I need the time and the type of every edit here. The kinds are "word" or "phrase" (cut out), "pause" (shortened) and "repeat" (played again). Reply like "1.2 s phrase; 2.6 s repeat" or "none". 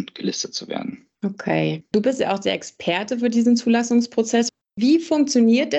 1.1 s pause